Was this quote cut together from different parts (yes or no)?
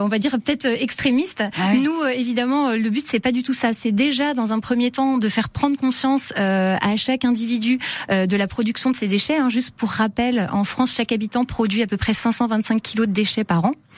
no